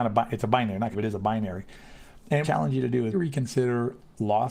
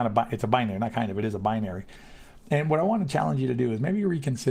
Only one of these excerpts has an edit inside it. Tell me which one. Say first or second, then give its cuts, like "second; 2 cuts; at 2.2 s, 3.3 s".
first; 3 cuts; at 0.9 s, 2.4 s, 3.1 s